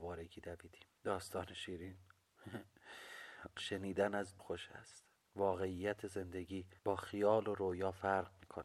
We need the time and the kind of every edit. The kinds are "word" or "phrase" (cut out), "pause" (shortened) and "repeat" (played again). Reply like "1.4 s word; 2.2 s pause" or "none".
0.9 s pause; 3.6 s phrase; 4.4 s word; 5.2 s pause; 6.8 s pause